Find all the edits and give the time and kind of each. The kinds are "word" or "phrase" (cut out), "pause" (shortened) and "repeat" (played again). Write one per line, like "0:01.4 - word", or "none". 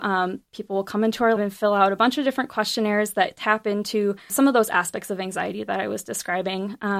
0:01.4 - word
0:04.3 - word